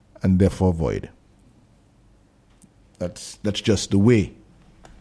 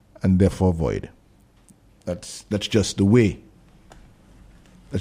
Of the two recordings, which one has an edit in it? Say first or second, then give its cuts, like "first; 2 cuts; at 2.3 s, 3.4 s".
second; 1 cut; at 1.4 s